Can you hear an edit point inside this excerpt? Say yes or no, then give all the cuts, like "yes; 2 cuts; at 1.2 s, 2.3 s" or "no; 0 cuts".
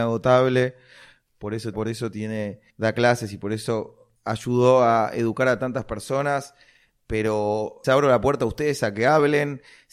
yes; 4 cuts; at 1.7 s, 2.7 s, 4.2 s, 7.8 s